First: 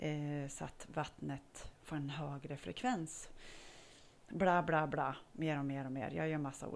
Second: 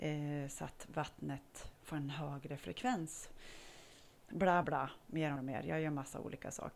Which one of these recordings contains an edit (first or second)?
second